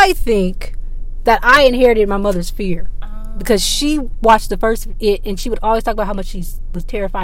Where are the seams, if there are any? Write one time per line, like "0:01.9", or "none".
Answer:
none

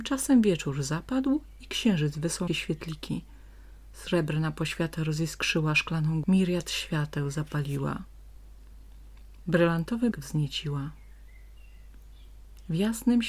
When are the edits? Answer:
0:02.5
0:06.2
0:10.1

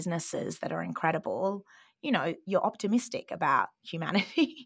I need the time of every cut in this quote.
none

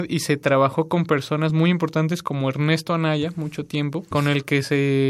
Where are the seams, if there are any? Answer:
none

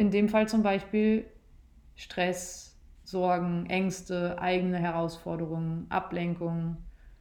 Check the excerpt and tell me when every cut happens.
none

